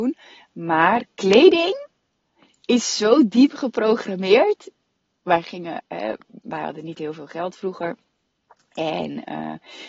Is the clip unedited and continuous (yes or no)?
yes